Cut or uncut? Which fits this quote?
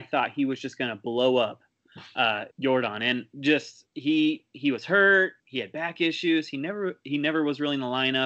cut